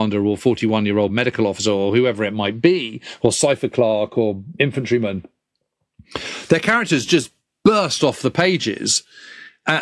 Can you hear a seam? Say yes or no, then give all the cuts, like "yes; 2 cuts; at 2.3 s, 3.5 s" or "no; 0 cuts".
no; 0 cuts